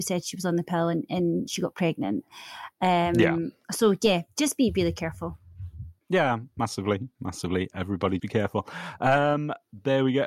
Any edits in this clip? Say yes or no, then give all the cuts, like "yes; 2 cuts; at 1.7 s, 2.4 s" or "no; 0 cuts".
yes; 2 cuts; at 6.0 s, 8.2 s